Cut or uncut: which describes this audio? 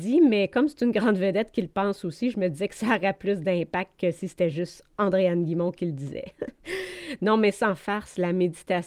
uncut